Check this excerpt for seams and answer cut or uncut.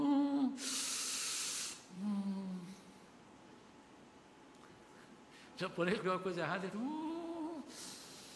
cut